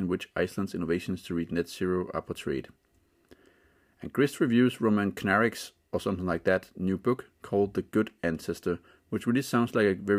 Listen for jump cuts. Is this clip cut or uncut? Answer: uncut